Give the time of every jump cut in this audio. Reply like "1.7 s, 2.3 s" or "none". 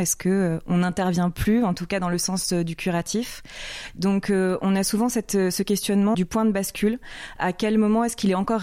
6.1 s